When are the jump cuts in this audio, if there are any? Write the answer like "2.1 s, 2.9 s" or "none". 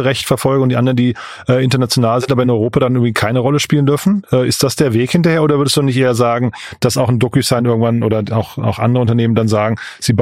none